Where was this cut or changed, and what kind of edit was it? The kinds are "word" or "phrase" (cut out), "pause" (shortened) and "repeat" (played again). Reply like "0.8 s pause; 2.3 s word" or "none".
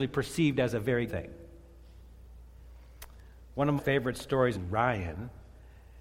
1.1 s word; 3.8 s word; 4.5 s phrase